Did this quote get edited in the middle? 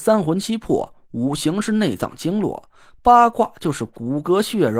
no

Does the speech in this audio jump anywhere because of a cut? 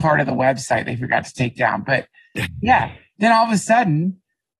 no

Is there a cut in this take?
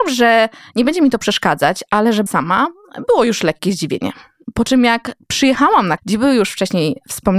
yes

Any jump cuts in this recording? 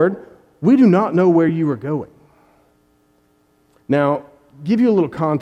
no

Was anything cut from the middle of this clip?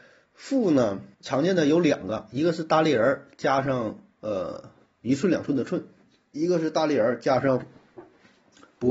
yes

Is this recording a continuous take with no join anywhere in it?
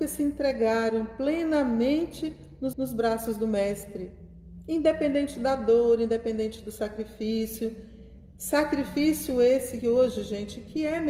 no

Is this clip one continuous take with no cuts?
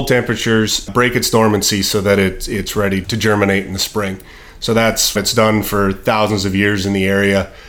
no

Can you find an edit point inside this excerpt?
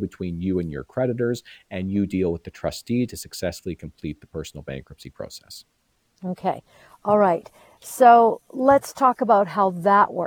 no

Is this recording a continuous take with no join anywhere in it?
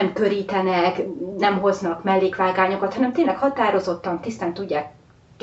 yes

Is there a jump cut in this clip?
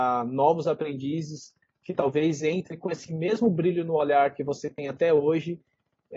no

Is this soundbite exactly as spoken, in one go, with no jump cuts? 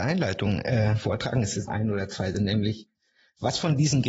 no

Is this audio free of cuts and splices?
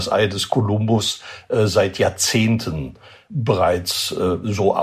yes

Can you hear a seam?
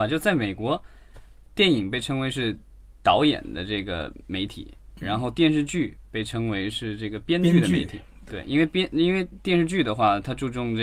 no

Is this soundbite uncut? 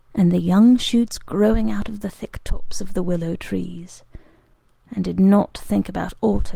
yes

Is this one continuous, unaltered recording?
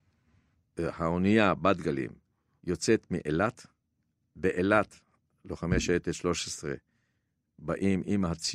yes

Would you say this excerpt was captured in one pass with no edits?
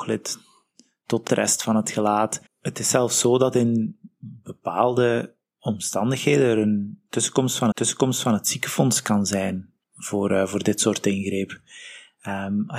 no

